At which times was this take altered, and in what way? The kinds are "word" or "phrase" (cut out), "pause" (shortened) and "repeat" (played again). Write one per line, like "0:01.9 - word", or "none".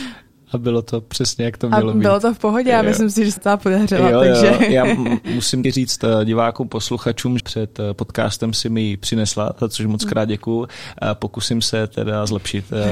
0:03.4 - phrase
0:05.6 - word
0:07.4 - word